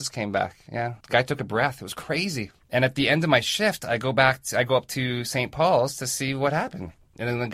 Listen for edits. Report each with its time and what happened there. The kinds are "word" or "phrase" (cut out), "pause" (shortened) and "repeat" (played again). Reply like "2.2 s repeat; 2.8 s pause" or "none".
1.0 s pause